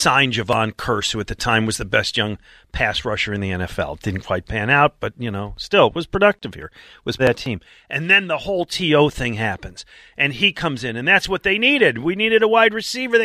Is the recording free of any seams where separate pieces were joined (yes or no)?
no